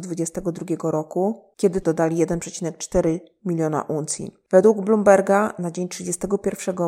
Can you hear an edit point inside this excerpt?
yes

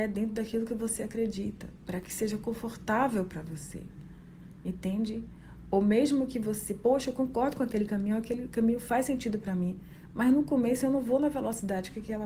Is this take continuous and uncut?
yes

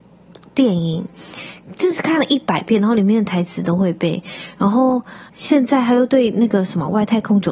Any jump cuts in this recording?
yes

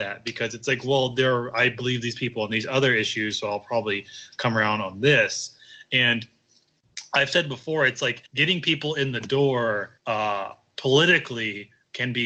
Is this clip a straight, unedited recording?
no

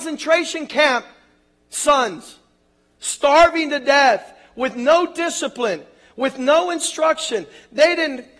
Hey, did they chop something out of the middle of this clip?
no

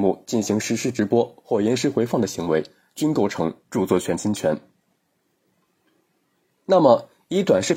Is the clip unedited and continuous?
yes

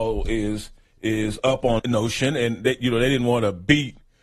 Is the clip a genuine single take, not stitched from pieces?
no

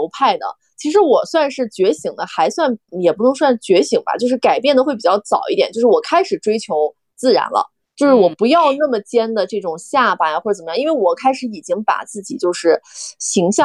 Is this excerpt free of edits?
no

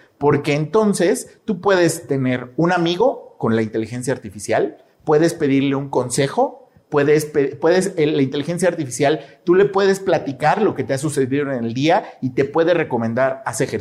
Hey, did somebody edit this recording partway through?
no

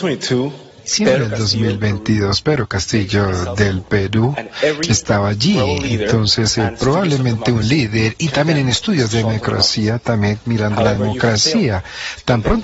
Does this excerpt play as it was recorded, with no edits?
yes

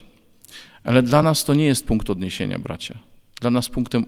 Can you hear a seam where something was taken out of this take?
no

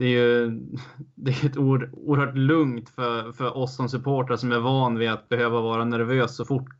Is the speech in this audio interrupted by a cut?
no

